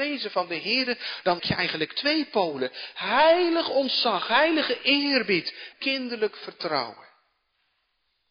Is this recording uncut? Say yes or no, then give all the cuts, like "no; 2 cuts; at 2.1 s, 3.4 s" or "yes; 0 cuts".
no; 2 cuts; at 1.4 s, 5.7 s